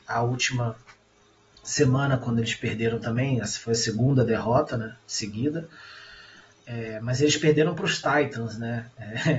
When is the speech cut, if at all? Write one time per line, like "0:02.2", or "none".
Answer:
none